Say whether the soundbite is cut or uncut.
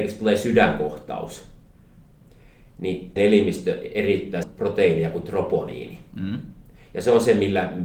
cut